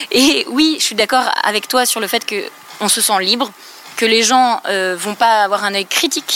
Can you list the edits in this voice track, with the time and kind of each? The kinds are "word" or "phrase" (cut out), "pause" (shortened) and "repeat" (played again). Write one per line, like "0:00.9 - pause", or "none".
none